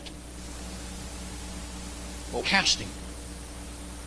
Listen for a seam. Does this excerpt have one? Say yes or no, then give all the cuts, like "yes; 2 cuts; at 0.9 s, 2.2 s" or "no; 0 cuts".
yes; 1 cut; at 2.4 s